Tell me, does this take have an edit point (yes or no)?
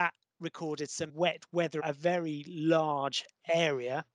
yes